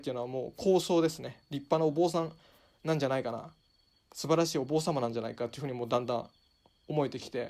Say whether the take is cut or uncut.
uncut